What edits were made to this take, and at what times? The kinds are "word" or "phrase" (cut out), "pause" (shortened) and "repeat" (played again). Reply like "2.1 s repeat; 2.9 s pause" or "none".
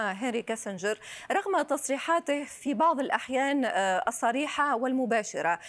none